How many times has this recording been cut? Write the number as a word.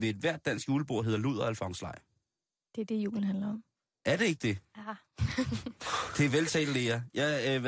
zero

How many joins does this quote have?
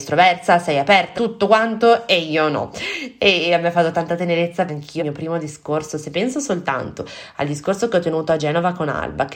three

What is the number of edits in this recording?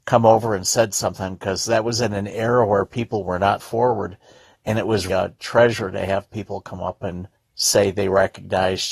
three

